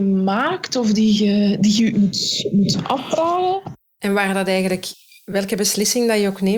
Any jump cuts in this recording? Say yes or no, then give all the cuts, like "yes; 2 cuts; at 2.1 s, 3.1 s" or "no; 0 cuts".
yes; 1 cut; at 1.9 s